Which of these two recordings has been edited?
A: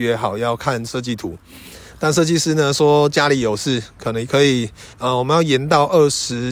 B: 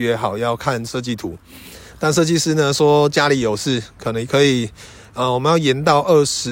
A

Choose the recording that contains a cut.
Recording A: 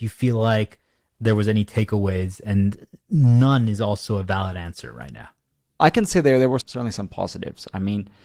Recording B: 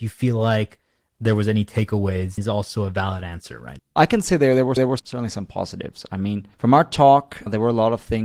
B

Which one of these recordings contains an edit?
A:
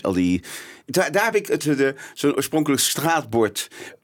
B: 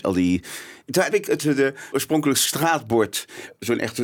B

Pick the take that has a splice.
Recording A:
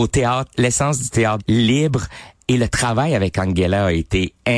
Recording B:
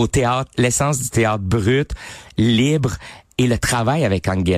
A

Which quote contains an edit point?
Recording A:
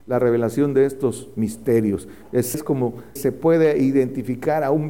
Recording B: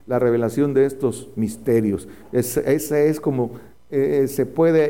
A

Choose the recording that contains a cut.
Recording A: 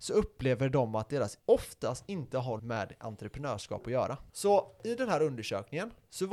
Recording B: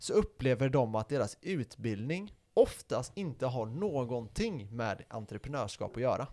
A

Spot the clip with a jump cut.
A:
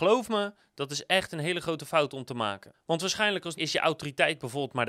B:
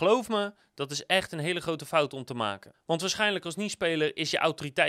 A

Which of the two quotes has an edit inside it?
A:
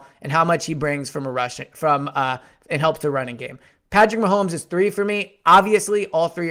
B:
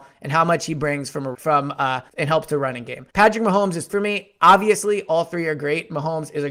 B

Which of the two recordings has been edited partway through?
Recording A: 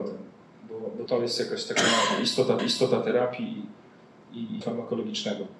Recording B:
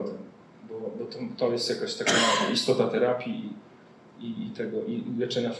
A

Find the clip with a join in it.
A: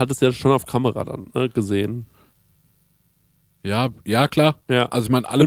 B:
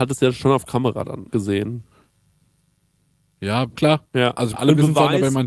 B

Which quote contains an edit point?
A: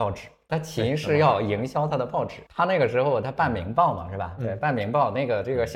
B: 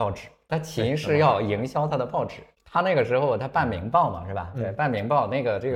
A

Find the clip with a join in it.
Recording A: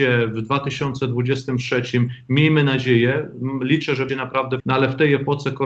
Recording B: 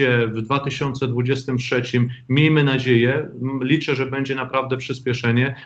A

